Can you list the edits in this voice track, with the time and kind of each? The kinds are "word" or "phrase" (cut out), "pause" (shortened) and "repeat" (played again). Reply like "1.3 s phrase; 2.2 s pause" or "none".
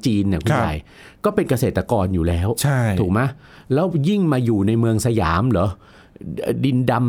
none